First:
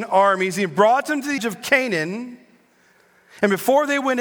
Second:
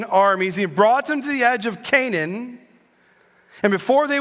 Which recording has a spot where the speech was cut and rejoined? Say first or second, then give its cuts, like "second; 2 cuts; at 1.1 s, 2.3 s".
first; 1 cut; at 1.4 s